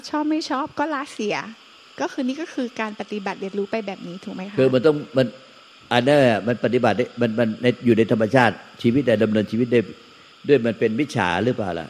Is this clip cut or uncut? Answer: uncut